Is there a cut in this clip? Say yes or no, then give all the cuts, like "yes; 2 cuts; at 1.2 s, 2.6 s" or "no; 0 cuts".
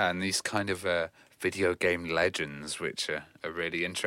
no; 0 cuts